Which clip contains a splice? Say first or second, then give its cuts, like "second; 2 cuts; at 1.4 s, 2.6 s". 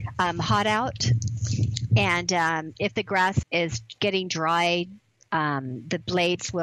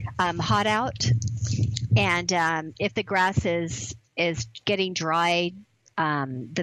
first; 1 cut; at 3.4 s